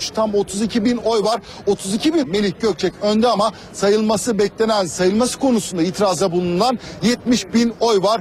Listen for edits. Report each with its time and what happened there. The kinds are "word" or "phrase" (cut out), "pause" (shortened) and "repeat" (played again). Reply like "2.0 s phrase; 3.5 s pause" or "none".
2.2 s word